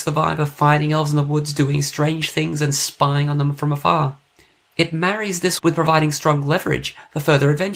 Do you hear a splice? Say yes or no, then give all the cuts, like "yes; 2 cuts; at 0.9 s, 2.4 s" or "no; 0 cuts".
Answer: yes; 1 cut; at 5.6 s